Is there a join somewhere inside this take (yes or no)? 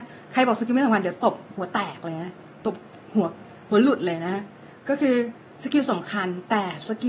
no